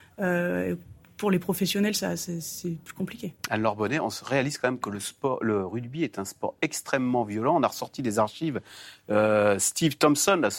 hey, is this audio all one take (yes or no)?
yes